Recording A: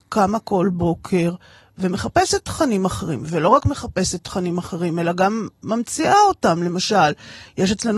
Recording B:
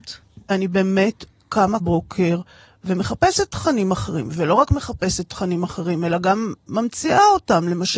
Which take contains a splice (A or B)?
B